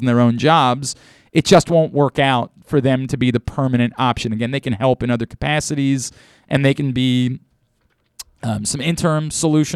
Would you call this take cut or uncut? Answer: uncut